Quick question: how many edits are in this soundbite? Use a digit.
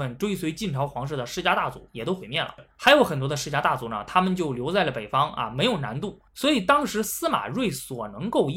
2